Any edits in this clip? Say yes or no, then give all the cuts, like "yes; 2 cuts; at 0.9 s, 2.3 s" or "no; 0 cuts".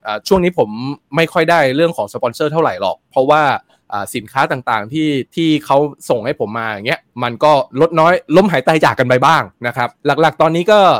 yes; 3 cuts; at 5.3 s, 7.1 s, 10.0 s